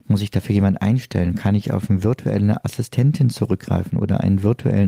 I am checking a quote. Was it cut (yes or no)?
no